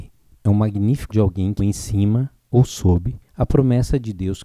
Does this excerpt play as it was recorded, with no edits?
no; 3 cuts; at 1.1 s, 1.6 s, 3.3 s

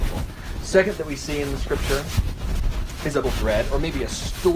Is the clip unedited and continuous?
no; 2 cuts; at 1.0 s, 3.2 s

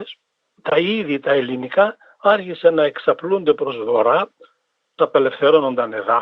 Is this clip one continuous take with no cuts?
no; 1 cut; at 5.0 s

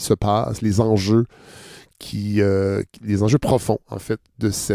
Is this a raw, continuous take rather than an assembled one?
yes; 0 cuts

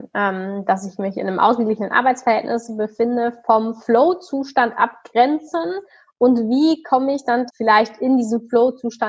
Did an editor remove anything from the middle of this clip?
yes; 1 cut; at 7.5 s

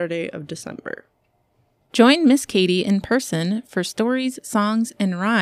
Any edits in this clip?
no; 0 cuts

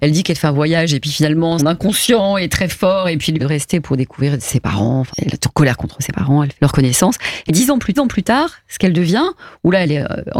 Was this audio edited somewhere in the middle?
yes; 6 cuts; at 1.6 s, 3.4 s, 5.1 s, 6.6 s, 7.5 s, 7.9 s

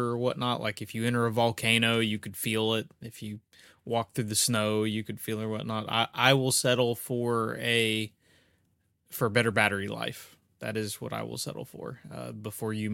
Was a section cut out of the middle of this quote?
no; 0 cuts

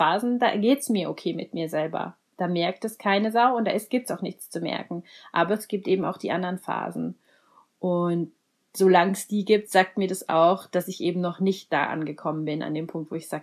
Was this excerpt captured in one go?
yes; 0 cuts

